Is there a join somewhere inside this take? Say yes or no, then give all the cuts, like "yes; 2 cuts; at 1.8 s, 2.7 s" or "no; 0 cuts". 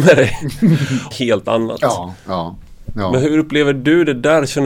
yes; 1 cut; at 1.1 s